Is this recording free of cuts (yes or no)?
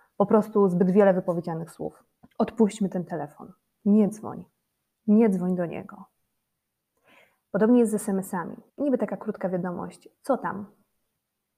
no